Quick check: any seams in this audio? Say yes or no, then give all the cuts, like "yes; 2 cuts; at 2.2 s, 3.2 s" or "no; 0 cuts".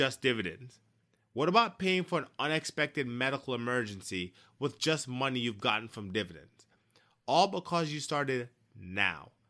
no; 0 cuts